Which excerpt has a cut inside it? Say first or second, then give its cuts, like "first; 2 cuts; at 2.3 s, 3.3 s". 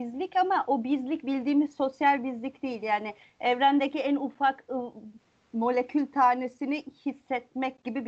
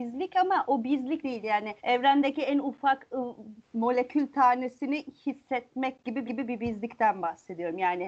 second; 4 cuts; at 1.2 s, 1.8 s, 3.7 s, 6.2 s